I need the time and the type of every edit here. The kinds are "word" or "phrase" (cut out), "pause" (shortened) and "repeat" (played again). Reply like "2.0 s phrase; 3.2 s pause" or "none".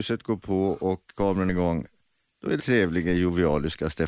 1.5 s word; 2.6 s word